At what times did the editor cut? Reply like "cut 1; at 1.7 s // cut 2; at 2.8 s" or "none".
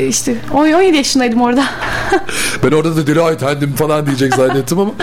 none